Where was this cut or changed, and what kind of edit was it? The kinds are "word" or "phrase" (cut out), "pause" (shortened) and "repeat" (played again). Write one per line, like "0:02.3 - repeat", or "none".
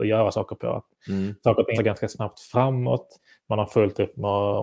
0:01.7 - word